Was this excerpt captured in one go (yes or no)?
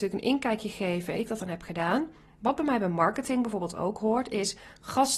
no